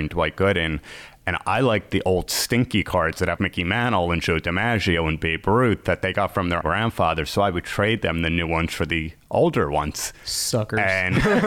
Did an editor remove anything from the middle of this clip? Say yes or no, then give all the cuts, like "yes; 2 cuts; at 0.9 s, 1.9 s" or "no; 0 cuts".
yes; 2 cuts; at 3.4 s, 6.6 s